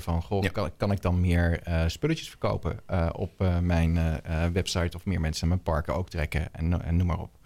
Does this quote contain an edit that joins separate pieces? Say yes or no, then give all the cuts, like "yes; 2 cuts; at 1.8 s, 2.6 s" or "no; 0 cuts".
no; 0 cuts